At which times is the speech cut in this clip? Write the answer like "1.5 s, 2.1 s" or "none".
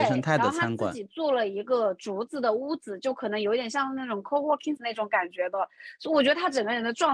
4.8 s